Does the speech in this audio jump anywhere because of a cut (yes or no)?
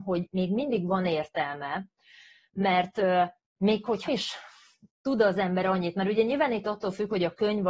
yes